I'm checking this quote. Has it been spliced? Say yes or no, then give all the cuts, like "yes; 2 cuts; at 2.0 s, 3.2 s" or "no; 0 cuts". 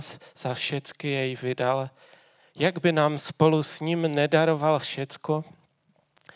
no; 0 cuts